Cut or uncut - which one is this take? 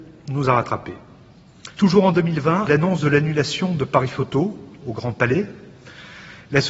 cut